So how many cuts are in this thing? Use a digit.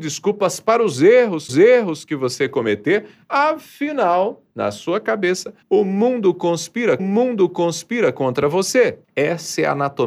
4